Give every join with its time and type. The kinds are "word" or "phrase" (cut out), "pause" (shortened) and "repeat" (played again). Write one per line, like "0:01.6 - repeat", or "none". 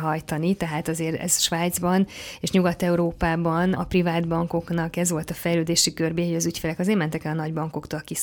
0:03.7 - word